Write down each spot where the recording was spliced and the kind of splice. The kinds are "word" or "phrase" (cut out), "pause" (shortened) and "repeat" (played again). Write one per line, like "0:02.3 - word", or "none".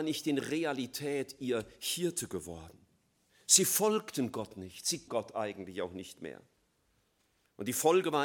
0:03.3 - pause
0:05.1 - word